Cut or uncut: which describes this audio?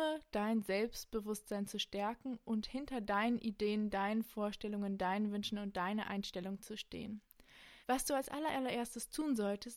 cut